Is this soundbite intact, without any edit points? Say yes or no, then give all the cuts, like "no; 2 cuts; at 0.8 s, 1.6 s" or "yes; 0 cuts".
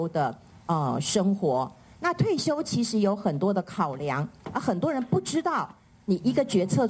yes; 0 cuts